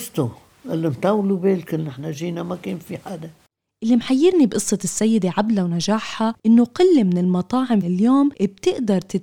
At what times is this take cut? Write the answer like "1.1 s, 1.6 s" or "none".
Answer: 7.8 s